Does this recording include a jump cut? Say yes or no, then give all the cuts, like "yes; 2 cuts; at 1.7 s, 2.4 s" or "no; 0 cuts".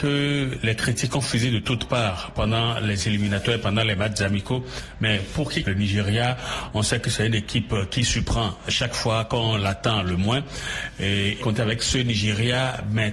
yes; 2 cuts; at 5.6 s, 11.4 s